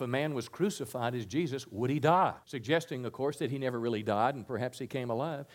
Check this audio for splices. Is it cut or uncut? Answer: cut